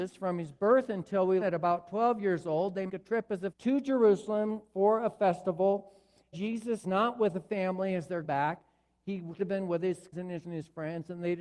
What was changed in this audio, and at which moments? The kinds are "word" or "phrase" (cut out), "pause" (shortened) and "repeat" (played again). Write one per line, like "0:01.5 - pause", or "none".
0:01.4 - word
0:02.9 - word
0:03.5 - word
0:06.3 - word
0:06.8 - word
0:08.2 - word
0:09.4 - word
0:10.1 - word
0:10.4 - word